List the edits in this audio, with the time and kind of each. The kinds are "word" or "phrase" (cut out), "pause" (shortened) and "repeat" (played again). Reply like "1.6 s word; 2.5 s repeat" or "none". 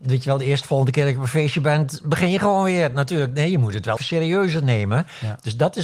4.0 s word